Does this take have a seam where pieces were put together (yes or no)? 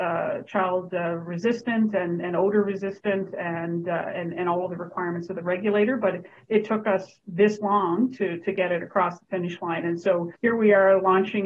yes